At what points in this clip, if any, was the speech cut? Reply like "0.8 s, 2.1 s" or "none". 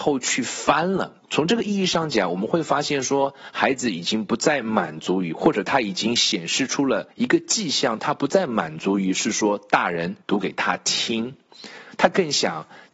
1.2 s, 7.1 s, 10.2 s